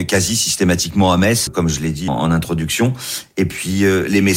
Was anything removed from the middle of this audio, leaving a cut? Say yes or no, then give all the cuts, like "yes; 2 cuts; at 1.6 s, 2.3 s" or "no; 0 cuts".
yes; 2 cuts; at 1.5 s, 2.1 s